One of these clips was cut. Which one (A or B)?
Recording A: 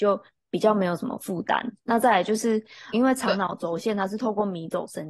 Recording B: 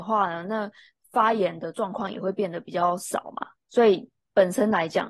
A